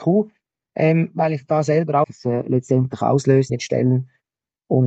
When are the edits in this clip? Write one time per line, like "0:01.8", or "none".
0:02.0
0:03.5